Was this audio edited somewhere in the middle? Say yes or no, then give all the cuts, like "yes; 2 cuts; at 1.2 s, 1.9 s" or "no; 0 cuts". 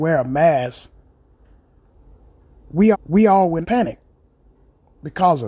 yes; 2 cuts; at 2.9 s, 3.6 s